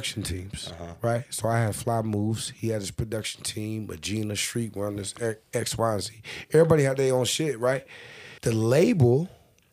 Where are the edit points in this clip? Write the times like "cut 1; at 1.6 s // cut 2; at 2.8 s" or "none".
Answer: cut 1; at 8.4 s